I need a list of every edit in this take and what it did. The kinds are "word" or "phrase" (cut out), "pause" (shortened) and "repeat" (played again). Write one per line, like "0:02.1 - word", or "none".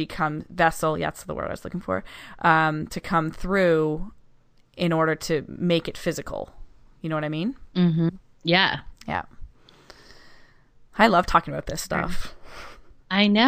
none